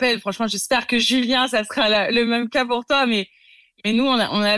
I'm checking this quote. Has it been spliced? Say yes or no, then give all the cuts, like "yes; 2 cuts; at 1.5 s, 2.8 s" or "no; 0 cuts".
no; 0 cuts